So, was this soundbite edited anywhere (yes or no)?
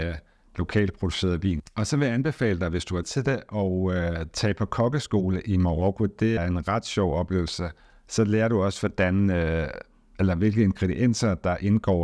yes